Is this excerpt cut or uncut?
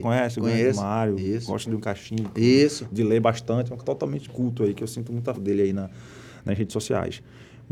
cut